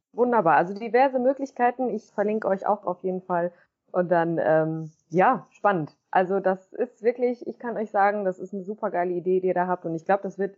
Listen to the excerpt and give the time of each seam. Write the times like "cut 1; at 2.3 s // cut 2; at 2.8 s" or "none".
none